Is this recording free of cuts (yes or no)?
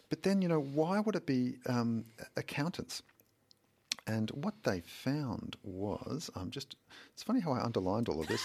yes